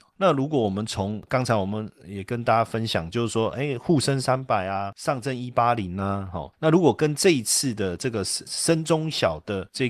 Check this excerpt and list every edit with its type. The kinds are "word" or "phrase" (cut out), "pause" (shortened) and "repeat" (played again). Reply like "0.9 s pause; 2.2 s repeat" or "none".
none